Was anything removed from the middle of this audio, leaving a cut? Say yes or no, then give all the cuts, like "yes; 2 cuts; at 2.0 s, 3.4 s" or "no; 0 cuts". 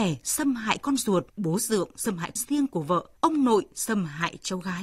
yes; 3 cuts; at 1.3 s, 2.4 s, 3.2 s